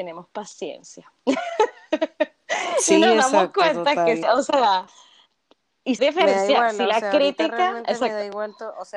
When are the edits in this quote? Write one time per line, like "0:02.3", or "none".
0:01.2
0:04.2
0:06.0